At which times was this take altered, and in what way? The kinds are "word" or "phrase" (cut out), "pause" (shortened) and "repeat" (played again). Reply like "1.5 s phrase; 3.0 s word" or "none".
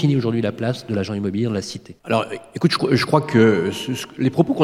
2.0 s pause